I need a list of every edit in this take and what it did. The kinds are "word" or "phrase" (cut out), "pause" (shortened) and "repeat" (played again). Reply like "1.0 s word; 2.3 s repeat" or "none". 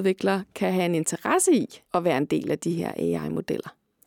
1.9 s pause